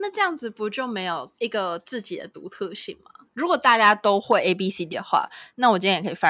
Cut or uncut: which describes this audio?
cut